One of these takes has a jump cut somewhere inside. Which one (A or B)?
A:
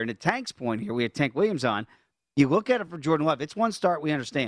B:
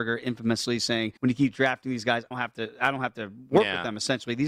B